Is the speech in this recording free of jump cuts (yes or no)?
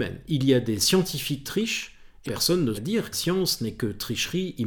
no